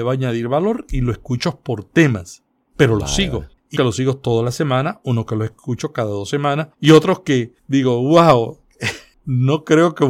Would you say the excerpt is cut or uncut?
cut